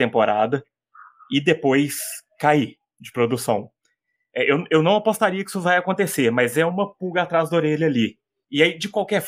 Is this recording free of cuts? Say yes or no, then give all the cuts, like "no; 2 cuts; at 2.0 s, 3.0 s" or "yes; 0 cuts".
yes; 0 cuts